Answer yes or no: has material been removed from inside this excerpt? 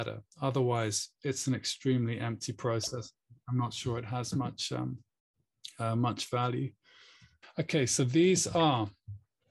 no